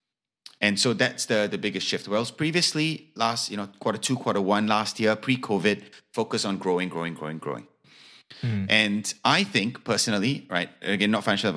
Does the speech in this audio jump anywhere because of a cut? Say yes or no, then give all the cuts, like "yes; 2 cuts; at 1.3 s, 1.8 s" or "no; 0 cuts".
no; 0 cuts